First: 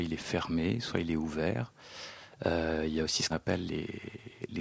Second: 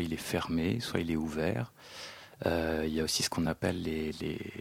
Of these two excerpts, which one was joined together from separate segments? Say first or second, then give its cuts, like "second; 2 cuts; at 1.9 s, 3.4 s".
first; 2 cuts; at 3.3 s, 3.7 s